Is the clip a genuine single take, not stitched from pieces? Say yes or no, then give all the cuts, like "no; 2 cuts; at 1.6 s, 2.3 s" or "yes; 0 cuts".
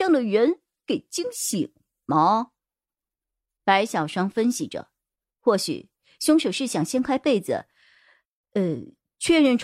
yes; 0 cuts